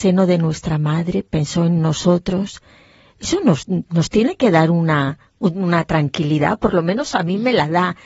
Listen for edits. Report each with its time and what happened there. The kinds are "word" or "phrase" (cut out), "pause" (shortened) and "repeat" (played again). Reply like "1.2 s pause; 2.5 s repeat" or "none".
none